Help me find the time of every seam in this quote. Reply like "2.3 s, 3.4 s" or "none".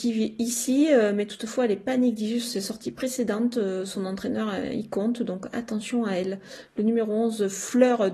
none